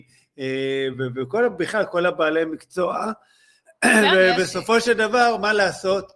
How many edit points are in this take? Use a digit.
0